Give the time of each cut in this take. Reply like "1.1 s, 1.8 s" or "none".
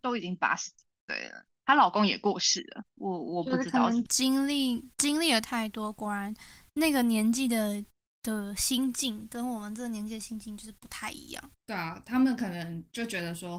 11.6 s